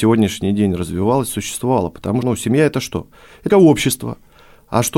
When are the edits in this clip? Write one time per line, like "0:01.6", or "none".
0:02.2
0:03.5